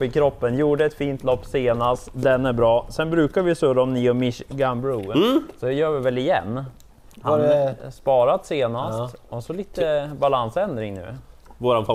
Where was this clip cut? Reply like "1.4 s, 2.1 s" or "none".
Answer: none